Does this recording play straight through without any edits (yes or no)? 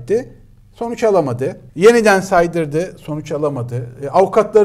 no